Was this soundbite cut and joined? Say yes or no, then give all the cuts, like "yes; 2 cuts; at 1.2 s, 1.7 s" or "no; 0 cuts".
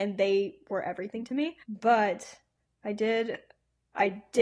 yes; 1 cut; at 1.6 s